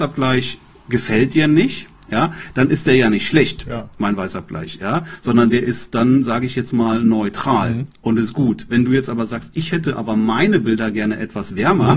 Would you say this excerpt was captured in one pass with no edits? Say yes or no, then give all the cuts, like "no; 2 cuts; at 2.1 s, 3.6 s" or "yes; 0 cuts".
no; 1 cut; at 1.9 s